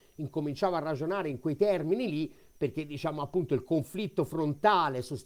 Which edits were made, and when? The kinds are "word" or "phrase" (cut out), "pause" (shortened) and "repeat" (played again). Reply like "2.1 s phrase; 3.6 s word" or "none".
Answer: none